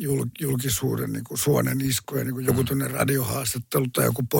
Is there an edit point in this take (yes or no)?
no